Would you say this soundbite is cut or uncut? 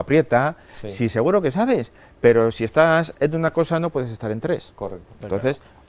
uncut